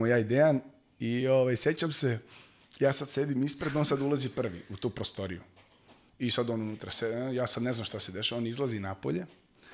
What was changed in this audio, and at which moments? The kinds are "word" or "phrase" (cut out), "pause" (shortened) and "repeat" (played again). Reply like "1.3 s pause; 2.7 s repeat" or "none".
none